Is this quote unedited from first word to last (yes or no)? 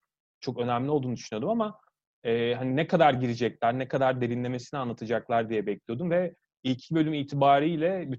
yes